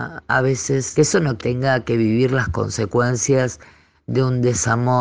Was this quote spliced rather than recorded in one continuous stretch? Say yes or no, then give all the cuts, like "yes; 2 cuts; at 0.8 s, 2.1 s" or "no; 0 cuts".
yes; 2 cuts; at 1.0 s, 1.4 s